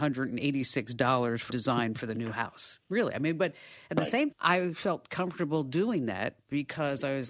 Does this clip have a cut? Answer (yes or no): yes